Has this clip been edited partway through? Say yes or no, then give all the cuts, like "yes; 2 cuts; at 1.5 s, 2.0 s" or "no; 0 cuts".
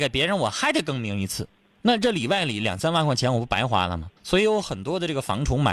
yes; 2 cuts; at 1.6 s, 4.2 s